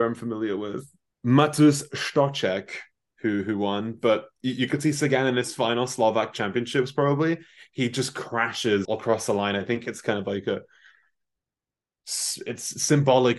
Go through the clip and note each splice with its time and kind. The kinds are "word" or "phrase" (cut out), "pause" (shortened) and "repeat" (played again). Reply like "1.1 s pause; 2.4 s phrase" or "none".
8.8 s word